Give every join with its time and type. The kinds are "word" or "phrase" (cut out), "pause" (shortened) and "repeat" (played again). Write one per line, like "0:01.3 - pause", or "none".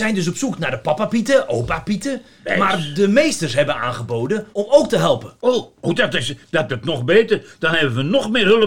0:04.5 - pause
0:05.4 - pause
0:05.9 - word
0:06.7 - word